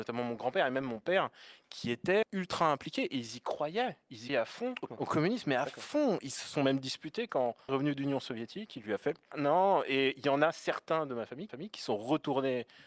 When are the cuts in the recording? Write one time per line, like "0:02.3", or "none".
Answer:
0:02.2
0:04.3
0:04.9
0:07.7
0:09.3
0:11.5